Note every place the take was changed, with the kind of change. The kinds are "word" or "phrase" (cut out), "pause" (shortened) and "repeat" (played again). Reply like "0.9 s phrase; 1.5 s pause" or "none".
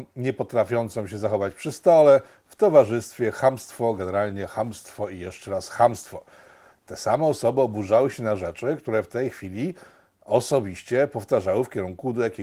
none